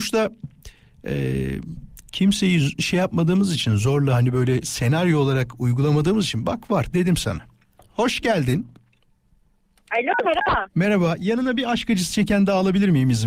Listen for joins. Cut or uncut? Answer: uncut